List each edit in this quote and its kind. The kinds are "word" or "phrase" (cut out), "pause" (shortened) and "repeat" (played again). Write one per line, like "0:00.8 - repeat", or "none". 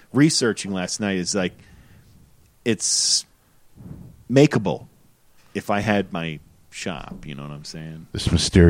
none